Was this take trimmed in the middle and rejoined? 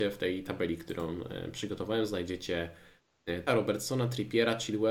yes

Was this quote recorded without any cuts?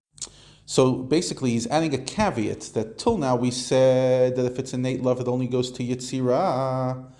yes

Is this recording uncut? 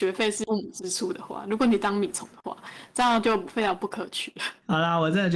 yes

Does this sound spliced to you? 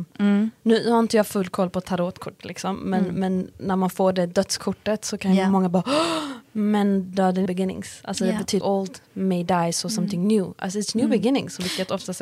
yes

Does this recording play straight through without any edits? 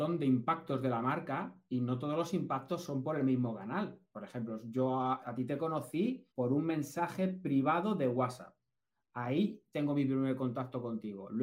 no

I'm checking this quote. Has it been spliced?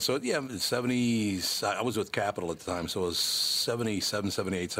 no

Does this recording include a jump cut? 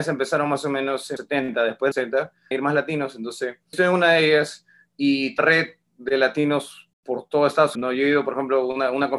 yes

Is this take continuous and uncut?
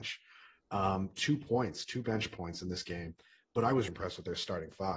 no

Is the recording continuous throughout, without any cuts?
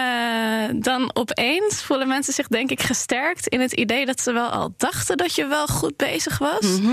yes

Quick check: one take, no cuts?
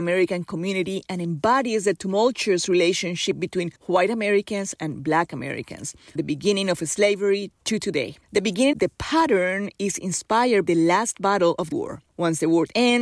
no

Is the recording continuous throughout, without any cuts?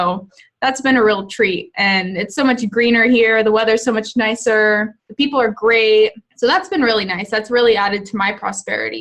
no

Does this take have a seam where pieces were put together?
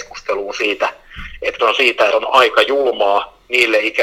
yes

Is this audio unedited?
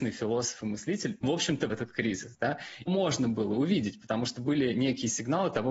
no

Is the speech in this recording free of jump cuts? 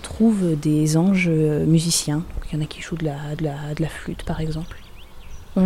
no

